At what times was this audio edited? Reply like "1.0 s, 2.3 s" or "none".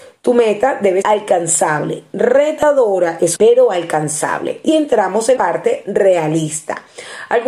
1.0 s, 3.4 s, 4.7 s, 5.4 s